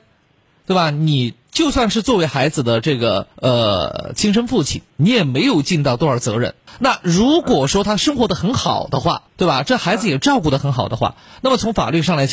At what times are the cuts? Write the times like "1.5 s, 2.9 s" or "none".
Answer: 3.3 s, 4.9 s, 6.7 s, 9.3 s